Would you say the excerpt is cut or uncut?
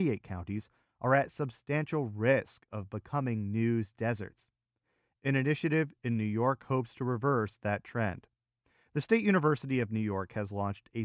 uncut